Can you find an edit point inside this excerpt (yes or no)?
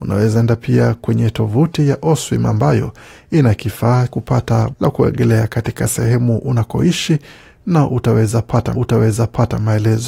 yes